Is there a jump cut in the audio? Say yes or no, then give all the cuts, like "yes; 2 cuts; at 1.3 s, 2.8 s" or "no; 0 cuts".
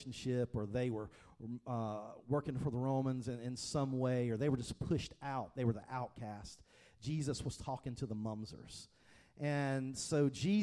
no; 0 cuts